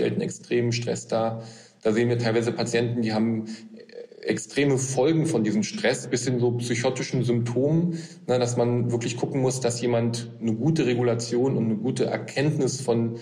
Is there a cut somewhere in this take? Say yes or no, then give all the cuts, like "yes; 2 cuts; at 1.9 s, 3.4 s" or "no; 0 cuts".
no; 0 cuts